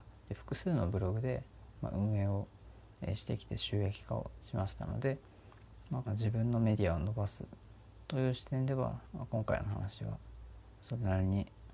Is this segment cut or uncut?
cut